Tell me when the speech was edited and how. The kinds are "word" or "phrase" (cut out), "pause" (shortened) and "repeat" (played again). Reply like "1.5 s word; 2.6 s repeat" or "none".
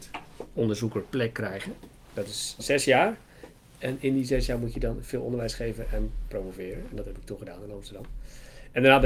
none